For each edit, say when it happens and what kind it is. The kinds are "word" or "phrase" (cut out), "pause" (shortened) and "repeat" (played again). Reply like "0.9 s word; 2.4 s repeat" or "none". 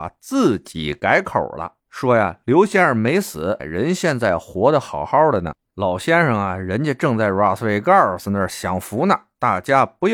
1.8 s pause; 3.6 s word